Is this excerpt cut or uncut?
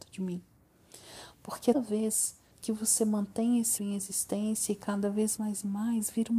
cut